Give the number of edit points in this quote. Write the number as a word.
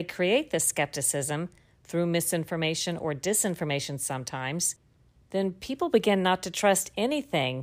zero